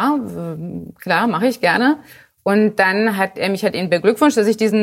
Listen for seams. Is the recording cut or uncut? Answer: uncut